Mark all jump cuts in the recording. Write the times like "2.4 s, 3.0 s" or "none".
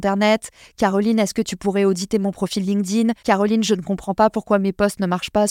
3.2 s